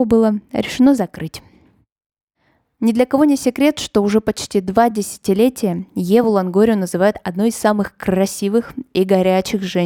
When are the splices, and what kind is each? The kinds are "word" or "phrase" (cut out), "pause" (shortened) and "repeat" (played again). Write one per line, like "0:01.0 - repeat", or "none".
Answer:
none